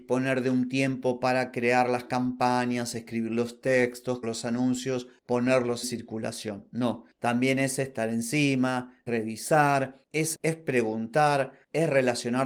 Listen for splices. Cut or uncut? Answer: cut